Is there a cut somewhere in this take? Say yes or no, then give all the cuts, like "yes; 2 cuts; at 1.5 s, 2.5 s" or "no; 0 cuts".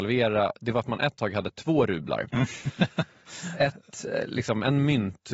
no; 0 cuts